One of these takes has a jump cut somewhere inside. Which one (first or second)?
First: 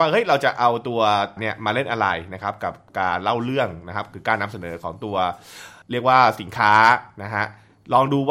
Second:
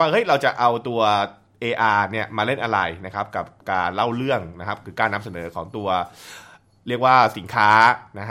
first